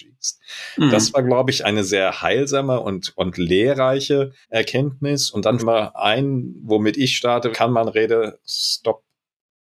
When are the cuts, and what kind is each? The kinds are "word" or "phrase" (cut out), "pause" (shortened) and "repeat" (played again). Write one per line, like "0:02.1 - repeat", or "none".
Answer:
0:01.6 - word
0:04.4 - pause
0:05.6 - phrase
0:07.5 - phrase